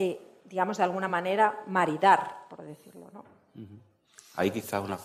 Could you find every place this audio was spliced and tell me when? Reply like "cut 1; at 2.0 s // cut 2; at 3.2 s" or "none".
none